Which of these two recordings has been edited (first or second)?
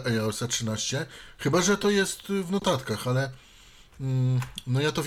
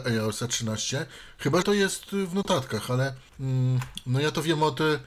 second